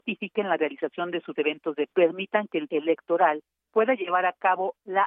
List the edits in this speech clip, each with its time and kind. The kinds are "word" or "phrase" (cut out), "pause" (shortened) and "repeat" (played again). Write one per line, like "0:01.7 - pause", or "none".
0:01.3 - word
0:01.9 - phrase
0:02.7 - word